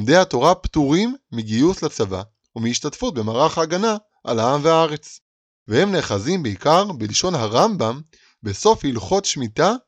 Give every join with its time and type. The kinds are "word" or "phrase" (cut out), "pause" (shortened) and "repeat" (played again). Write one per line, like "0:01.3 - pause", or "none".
none